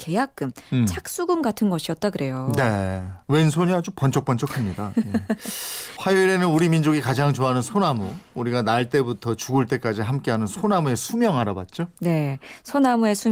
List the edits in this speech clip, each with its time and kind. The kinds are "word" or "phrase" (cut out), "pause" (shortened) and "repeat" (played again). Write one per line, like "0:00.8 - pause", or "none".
0:03.2 - pause